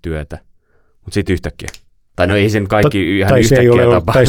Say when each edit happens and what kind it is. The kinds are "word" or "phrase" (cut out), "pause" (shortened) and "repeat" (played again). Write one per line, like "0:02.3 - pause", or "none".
none